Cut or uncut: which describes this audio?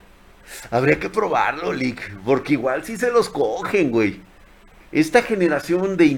uncut